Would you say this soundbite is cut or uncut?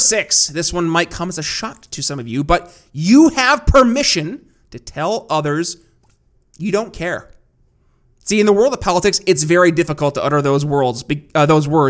uncut